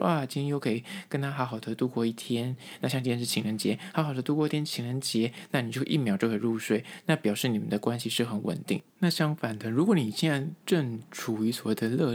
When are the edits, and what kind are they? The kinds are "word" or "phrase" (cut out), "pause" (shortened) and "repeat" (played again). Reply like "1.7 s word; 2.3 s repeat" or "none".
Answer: 8.9 s pause; 10.6 s pause